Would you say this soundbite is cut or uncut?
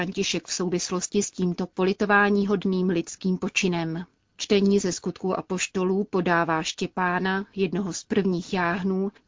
uncut